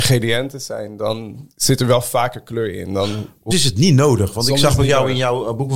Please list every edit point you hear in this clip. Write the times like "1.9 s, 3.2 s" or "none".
3.5 s

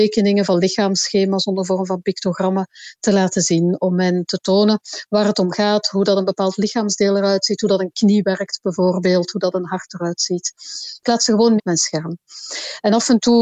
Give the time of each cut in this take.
11.6 s

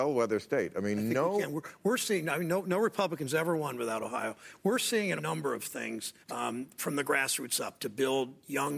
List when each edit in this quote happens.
5.2 s, 6.2 s

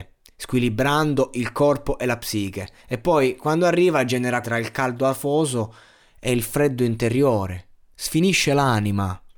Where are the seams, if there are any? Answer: 2.8 s, 4.4 s

